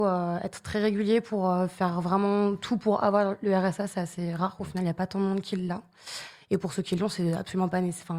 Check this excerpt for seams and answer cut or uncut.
uncut